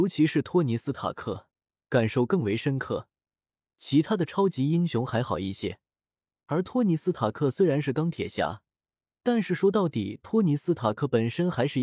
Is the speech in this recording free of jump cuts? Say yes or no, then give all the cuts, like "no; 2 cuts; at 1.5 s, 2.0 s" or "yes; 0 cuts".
yes; 0 cuts